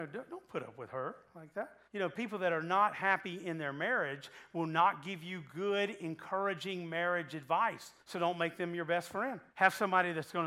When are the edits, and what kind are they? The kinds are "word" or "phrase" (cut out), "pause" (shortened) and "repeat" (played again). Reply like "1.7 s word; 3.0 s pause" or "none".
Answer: 1.9 s pause; 8.0 s pause; 9.5 s pause